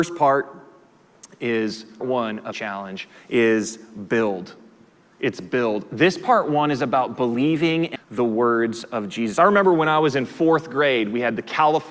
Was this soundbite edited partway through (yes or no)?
yes